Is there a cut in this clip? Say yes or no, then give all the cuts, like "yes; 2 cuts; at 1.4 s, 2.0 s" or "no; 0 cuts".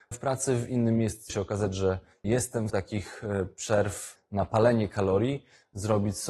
yes; 2 cuts; at 1.3 s, 2.7 s